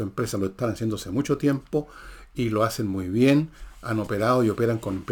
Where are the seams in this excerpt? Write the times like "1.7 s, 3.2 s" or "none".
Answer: none